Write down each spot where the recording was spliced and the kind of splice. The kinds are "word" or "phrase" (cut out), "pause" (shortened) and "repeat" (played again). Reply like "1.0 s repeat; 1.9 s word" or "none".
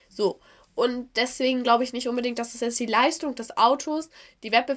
none

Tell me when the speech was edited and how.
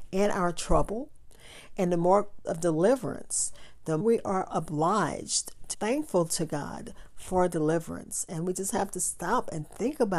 2.4 s word; 4.0 s word; 4.5 s word; 5.7 s word

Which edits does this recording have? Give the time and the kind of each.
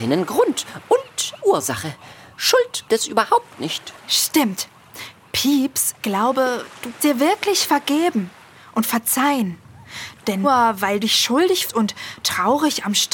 1.4 s word; 2.9 s word; 6.0 s word; 7.0 s word; 10.4 s word; 11.0 s word; 11.7 s word

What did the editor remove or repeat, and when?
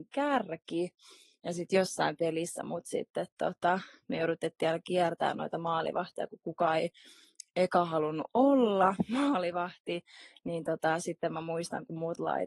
none

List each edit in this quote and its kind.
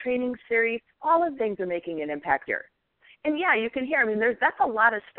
0.9 s pause; 1.3 s word; 2.5 s word

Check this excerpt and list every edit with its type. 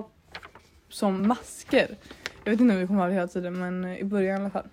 none

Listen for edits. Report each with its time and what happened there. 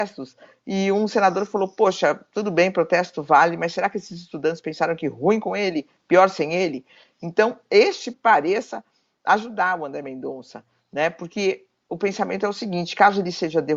8.1 s phrase

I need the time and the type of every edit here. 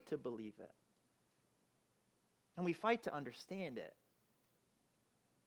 none

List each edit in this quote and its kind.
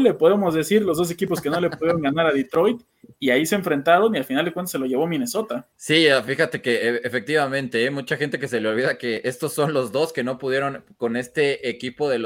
5.7 s pause

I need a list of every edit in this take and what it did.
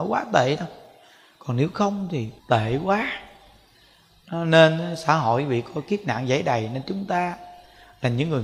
2.4 s pause

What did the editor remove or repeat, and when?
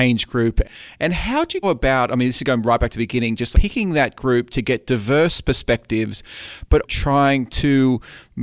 1.6 s word; 3.5 s word; 6.8 s word

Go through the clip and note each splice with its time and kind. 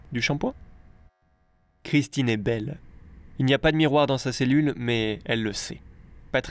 1.1 s pause

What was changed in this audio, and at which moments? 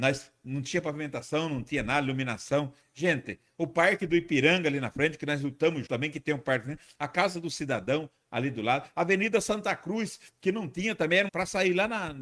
5.9 s word; 11.3 s phrase

